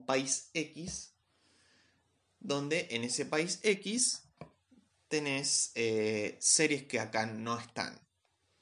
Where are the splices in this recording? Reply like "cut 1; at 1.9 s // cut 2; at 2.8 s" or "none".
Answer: none